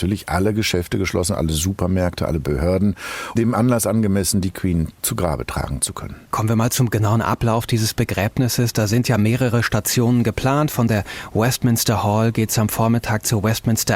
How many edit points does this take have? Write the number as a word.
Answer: one